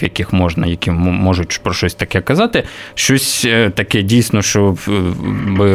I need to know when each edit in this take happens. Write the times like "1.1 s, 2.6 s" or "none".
none